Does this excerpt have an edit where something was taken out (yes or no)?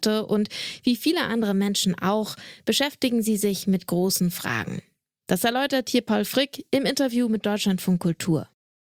no